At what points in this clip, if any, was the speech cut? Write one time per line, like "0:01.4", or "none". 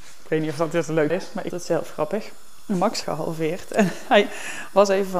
0:01.1
0:01.5
0:03.0